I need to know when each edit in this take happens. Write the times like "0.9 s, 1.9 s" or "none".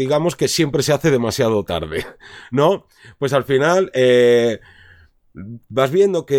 none